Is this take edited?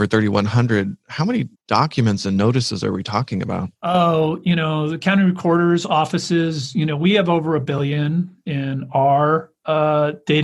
yes; 2 cuts; at 1.5 s, 3.7 s

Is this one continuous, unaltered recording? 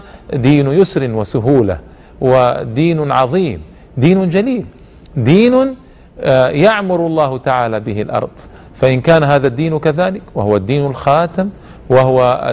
yes; 0 cuts

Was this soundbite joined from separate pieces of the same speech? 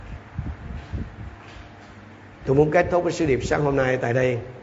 no; 0 cuts

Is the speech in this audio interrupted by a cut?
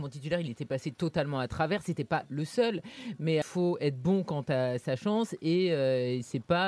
yes; 1 cut; at 3.4 s

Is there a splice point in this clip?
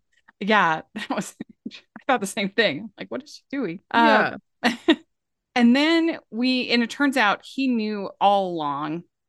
yes; 1 cut; at 3.9 s

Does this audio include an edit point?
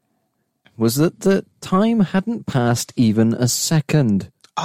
no; 0 cuts

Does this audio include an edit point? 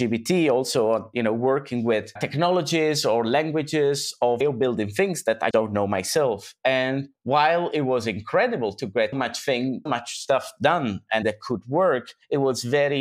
yes; 6 cuts; at 2.2 s, 4.4 s, 5.5 s, 9.1 s, 9.9 s, 11.2 s

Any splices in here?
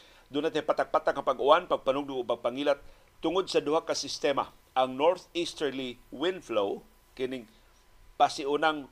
no; 0 cuts

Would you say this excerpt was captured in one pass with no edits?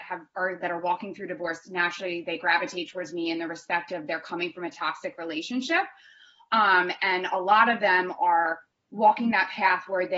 yes; 0 cuts

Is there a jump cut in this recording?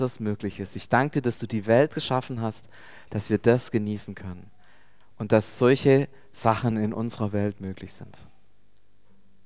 no; 0 cuts

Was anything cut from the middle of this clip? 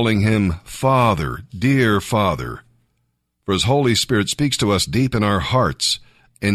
no; 0 cuts

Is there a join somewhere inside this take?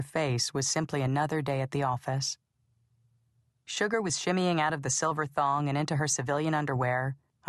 no; 0 cuts

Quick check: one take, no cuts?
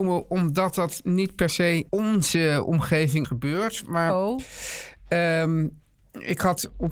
no; 2 cuts; at 1.9 s, 3.2 s

